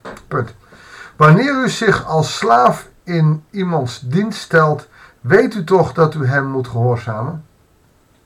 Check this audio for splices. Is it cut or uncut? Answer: uncut